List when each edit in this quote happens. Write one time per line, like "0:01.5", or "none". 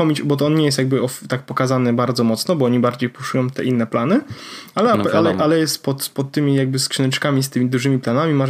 none